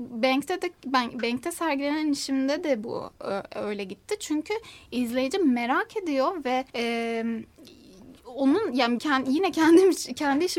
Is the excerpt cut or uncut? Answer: cut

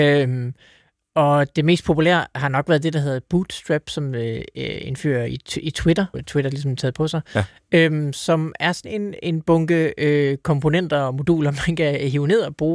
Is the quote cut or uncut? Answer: cut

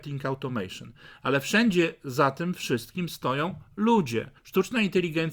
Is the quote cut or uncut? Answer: cut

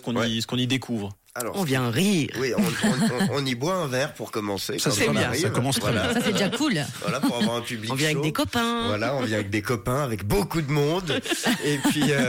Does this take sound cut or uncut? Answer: uncut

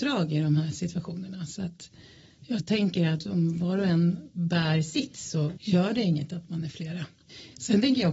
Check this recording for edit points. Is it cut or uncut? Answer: uncut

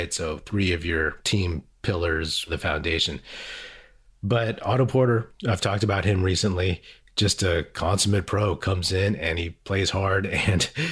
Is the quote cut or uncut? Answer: uncut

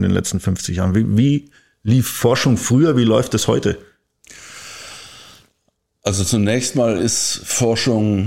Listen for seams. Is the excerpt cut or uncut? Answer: uncut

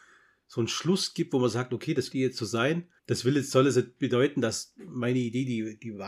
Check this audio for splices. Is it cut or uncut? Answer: cut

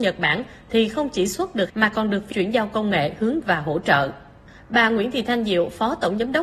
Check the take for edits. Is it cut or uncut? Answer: cut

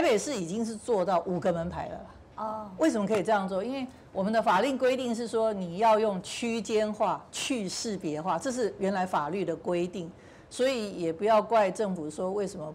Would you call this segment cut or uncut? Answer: cut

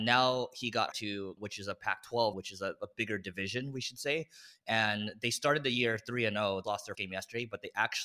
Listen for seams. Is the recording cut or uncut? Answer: cut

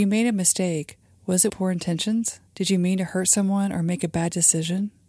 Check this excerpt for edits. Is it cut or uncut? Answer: cut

